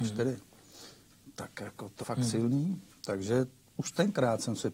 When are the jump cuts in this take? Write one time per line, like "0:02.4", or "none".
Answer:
0:02.0